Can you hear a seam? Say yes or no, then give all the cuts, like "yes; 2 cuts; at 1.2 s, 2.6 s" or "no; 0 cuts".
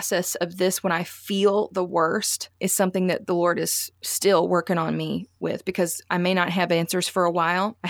no; 0 cuts